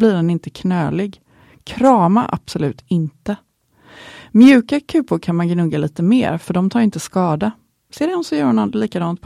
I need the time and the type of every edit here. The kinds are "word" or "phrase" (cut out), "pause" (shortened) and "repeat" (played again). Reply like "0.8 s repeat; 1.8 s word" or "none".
none